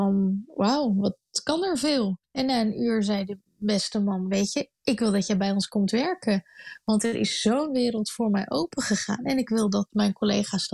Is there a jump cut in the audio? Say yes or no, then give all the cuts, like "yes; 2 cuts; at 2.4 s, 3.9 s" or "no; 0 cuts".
yes; 2 cuts; at 2.2 s, 4.7 s